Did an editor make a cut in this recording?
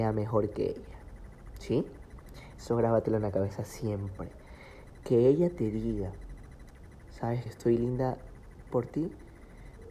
yes; 2 cuts; at 7.5 s, 8.7 s

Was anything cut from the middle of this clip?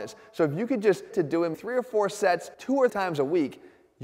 yes; 4 cuts; at 1.1 s, 1.5 s, 2.5 s, 2.9 s

